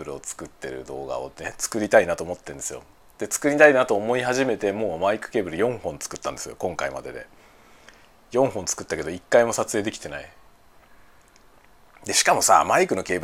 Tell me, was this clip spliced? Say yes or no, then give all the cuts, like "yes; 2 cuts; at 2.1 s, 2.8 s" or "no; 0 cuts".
no; 0 cuts